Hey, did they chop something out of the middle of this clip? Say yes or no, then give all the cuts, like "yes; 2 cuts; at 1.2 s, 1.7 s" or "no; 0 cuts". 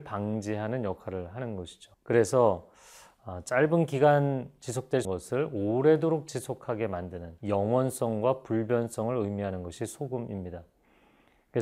yes; 3 cuts; at 1.9 s, 5.0 s, 7.4 s